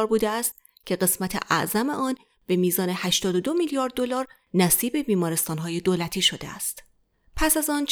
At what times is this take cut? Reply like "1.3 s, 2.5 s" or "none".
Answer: none